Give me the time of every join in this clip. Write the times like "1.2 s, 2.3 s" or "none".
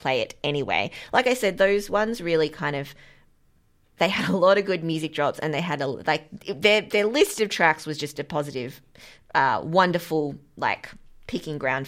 none